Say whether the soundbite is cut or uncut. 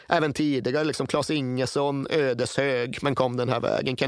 uncut